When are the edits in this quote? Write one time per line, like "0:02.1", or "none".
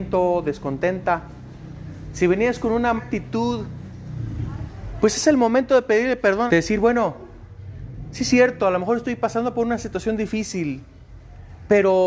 0:03.0
0:06.5